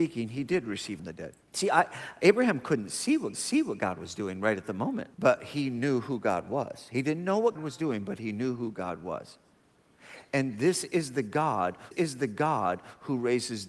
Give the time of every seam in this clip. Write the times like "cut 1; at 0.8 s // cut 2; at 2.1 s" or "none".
cut 1; at 1.0 s // cut 2; at 1.4 s // cut 3; at 3.3 s // cut 4; at 5.1 s // cut 5; at 7.6 s // cut 6; at 11.9 s